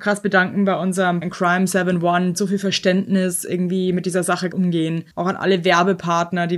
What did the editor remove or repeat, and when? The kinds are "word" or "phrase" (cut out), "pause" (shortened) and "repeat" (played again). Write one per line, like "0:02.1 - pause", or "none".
0:01.2 - word
0:02.3 - phrase
0:04.5 - word
0:05.1 - pause